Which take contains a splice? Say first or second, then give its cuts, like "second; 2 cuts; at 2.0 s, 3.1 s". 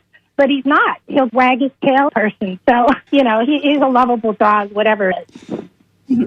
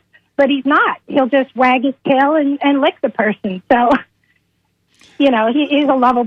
first; 4 cuts; at 1.3 s, 2.1 s, 3.1 s, 5.1 s